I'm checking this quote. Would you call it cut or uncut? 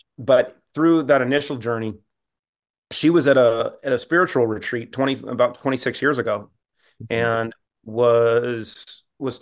uncut